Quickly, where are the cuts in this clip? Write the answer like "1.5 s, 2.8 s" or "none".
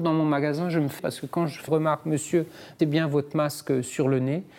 1.0 s, 1.7 s, 2.8 s